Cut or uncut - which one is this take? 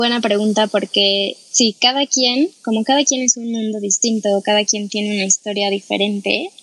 uncut